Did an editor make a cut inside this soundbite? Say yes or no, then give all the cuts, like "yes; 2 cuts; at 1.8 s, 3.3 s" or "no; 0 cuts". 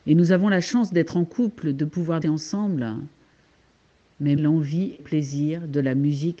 yes; 3 cuts; at 2.2 s, 4.4 s, 5.0 s